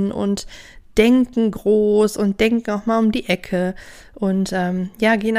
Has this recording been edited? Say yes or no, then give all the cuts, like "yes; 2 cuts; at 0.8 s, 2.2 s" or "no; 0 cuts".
no; 0 cuts